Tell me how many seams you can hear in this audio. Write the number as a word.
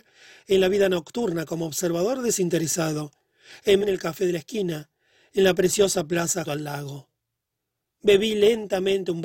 two